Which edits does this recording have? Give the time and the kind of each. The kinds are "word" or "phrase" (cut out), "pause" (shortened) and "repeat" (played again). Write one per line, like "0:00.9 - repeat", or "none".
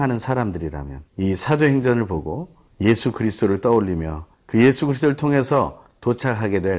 0:01.1 - pause
0:02.7 - pause
0:04.3 - pause